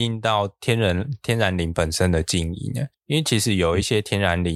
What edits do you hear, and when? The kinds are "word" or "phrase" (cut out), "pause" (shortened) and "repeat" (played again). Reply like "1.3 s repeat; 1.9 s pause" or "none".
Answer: 2.9 s pause